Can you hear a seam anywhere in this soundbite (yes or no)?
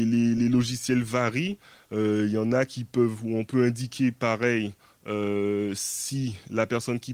no